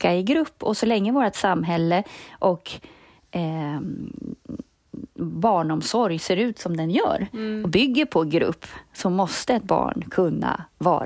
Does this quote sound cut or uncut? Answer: uncut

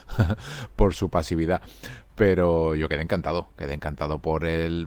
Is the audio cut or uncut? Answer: uncut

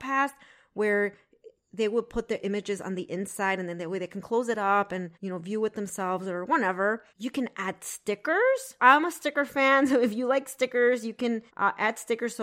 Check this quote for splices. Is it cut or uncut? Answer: cut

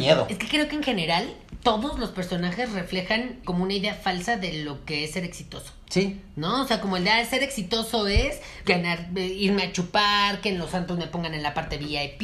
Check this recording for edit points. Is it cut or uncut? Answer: cut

